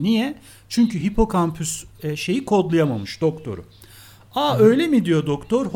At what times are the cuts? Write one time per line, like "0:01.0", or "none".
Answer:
none